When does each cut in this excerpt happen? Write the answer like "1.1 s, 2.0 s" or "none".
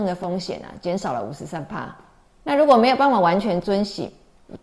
2.3 s